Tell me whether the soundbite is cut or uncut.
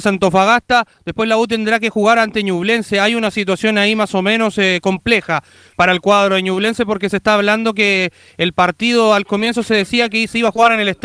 uncut